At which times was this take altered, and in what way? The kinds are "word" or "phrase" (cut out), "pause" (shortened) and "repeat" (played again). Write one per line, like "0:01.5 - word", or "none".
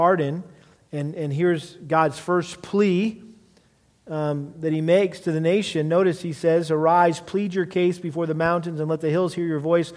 none